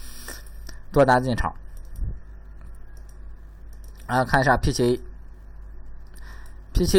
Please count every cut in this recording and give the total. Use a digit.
0